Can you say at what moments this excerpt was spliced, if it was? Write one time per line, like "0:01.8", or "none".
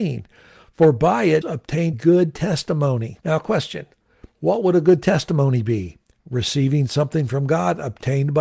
0:01.4
0:01.9
0:03.2
0:04.3